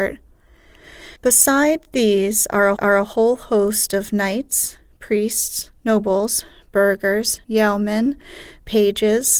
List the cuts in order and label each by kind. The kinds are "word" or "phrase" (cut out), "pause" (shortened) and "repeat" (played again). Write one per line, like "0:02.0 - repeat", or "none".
0:01.2 - pause
0:02.8 - repeat
0:05.8 - pause
0:07.4 - pause

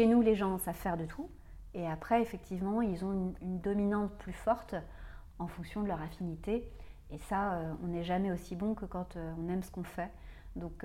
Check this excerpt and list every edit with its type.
none

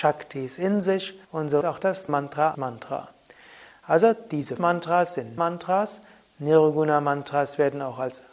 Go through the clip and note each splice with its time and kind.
0:01.2 - pause
0:01.6 - word
0:02.1 - phrase
0:02.5 - phrase
0:04.6 - word
0:05.4 - word

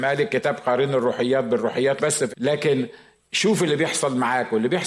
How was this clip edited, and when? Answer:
0:02.0 - word
0:02.3 - word

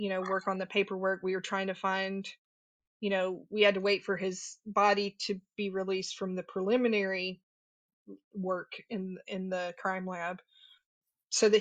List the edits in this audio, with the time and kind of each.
none

